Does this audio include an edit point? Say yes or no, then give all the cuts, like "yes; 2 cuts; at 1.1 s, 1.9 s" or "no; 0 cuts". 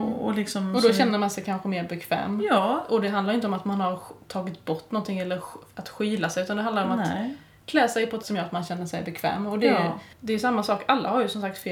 yes; 2 cuts; at 8.2 s, 10.1 s